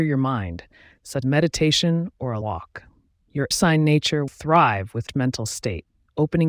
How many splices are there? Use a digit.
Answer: 5